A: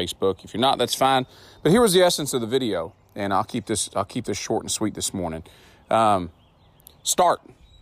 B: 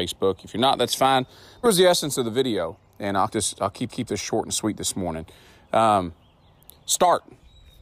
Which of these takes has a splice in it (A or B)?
B